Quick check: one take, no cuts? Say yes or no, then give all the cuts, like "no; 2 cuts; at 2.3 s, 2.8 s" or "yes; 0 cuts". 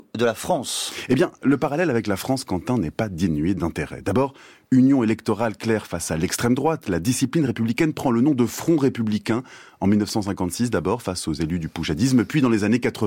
yes; 0 cuts